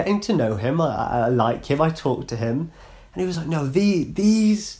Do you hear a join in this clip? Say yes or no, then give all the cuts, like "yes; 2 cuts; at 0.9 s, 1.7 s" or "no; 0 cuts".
no; 0 cuts